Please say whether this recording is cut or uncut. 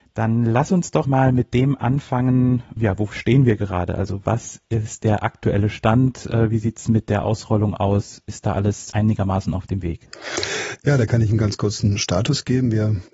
cut